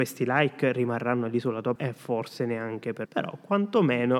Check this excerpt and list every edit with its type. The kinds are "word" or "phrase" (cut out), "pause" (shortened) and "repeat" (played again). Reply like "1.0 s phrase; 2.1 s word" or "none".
1.8 s word; 3.1 s word

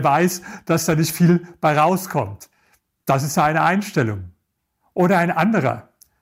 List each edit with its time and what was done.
none

